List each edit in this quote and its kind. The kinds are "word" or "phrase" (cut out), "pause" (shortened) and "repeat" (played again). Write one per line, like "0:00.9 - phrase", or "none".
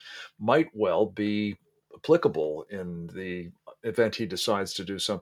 none